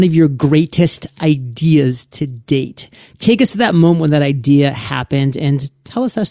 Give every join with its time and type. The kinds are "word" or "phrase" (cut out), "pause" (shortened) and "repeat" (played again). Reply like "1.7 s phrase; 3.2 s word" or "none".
none